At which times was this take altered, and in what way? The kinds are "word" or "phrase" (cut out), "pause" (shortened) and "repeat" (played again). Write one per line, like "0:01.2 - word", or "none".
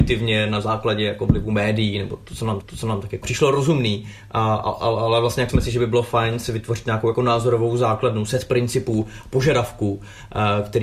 0:02.6 - repeat
0:03.2 - word
0:05.5 - word